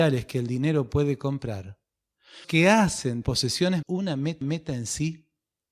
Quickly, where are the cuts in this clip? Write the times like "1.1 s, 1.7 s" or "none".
2.4 s, 3.2 s, 3.8 s, 4.4 s